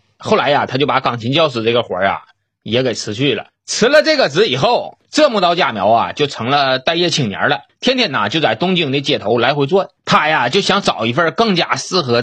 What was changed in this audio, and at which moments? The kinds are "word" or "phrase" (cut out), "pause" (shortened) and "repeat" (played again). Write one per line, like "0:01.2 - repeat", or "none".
none